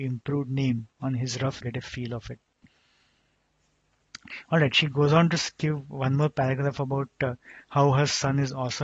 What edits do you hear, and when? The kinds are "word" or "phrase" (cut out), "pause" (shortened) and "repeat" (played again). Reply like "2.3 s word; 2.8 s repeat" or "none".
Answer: 1.6 s phrase